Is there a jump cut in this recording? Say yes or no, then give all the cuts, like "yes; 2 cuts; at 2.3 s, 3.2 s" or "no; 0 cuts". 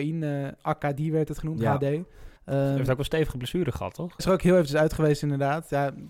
yes; 2 cuts; at 2.4 s, 4.2 s